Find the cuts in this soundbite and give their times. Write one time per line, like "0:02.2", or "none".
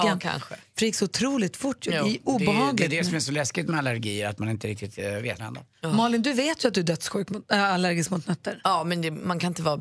0:05.4